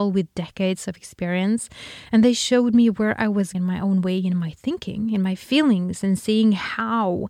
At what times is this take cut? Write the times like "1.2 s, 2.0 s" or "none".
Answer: 3.5 s